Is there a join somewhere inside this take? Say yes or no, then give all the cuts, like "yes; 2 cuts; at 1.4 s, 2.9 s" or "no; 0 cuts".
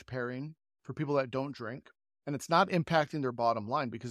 no; 0 cuts